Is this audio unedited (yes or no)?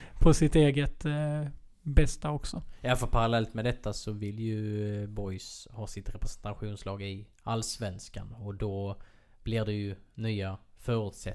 yes